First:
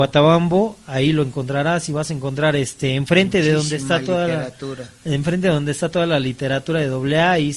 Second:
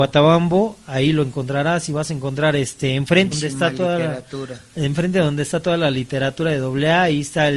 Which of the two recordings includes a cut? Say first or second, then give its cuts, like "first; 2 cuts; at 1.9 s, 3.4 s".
second; 1 cut; at 3.3 s